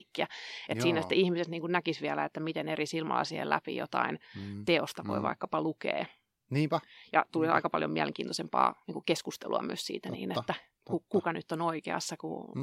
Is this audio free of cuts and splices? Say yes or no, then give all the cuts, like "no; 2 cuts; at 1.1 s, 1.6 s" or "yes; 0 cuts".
yes; 0 cuts